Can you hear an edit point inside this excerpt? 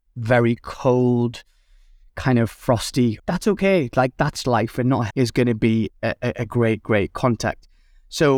yes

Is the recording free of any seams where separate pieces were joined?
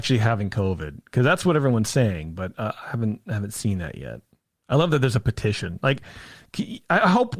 yes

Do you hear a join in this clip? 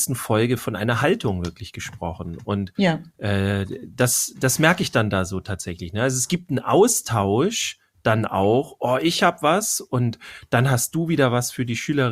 no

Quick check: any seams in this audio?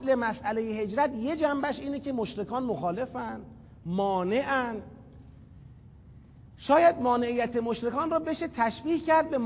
no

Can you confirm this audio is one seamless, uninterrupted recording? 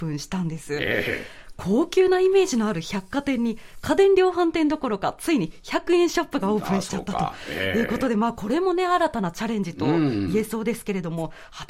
yes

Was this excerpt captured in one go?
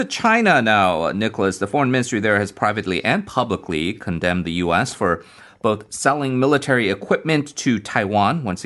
yes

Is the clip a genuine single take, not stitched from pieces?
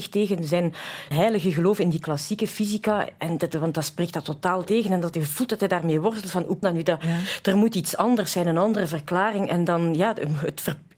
no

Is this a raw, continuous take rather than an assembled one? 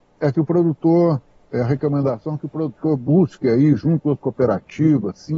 no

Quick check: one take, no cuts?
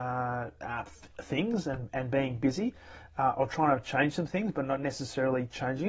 yes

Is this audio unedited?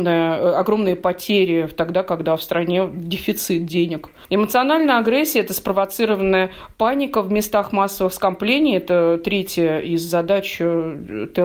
yes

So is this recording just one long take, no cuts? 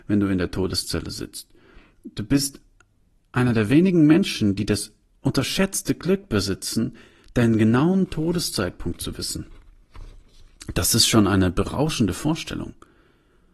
yes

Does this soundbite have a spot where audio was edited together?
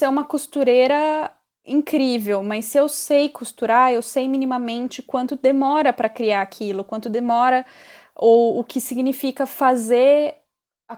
no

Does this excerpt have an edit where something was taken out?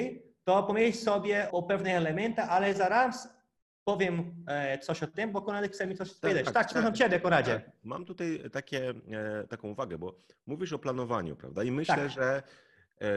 yes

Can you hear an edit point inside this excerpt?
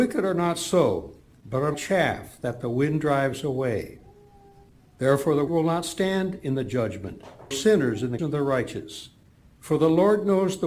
yes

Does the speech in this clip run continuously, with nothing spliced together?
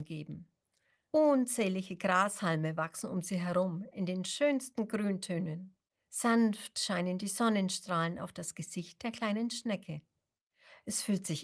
yes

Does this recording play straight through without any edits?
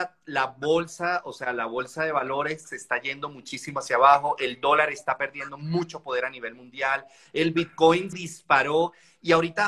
no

